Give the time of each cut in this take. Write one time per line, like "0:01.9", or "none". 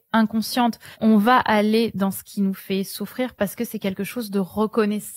0:00.9